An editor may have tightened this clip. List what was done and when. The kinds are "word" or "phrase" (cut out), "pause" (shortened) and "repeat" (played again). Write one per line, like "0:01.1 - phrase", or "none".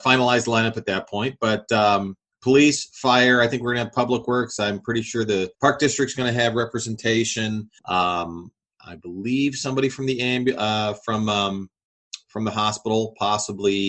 0:05.5 - pause
0:07.8 - pause